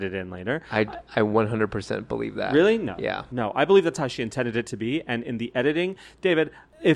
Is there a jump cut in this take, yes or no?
no